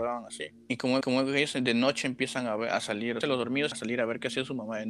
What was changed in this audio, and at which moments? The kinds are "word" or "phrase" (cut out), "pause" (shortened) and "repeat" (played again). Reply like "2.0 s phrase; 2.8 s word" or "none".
1.0 s repeat; 3.2 s phrase; 3.7 s word